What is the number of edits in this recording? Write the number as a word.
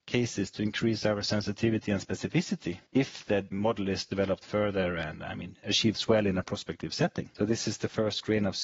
zero